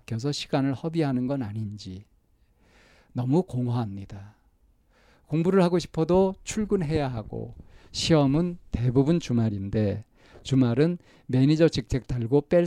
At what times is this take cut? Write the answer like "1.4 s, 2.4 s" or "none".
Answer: none